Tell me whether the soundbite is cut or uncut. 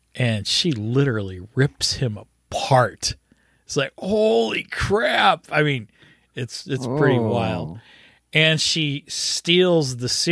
uncut